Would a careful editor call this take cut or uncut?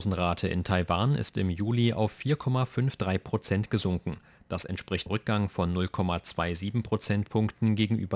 cut